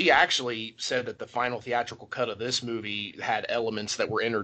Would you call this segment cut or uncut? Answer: uncut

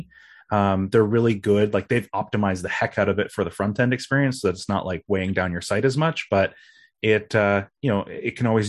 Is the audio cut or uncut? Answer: uncut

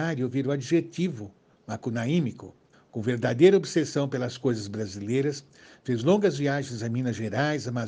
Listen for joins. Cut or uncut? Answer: cut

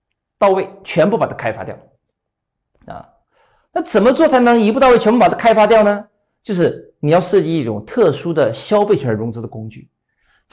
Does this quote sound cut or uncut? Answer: uncut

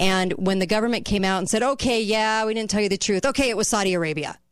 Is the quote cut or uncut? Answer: uncut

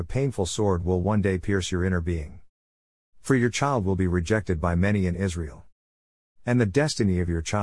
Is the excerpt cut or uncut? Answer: uncut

